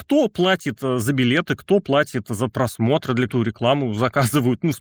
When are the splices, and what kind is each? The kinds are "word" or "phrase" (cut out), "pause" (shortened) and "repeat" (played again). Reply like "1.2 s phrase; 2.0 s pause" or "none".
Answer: 3.3 s word